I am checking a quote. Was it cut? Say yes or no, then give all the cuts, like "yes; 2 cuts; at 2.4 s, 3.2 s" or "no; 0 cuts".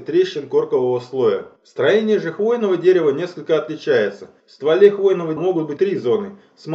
yes; 4 cuts; at 1.6 s, 4.4 s, 5.4 s, 5.8 s